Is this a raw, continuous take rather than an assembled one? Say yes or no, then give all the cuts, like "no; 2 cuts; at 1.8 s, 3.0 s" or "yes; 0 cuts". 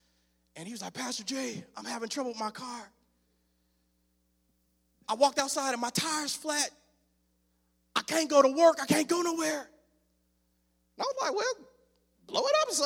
yes; 0 cuts